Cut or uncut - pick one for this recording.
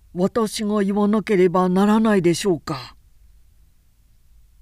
uncut